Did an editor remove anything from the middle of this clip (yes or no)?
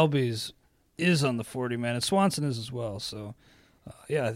no